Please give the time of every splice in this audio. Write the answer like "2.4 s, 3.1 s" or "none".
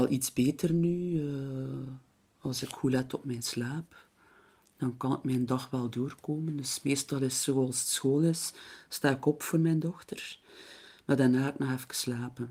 none